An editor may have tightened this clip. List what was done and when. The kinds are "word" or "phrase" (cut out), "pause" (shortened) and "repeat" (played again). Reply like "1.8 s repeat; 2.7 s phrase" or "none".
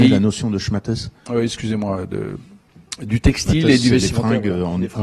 none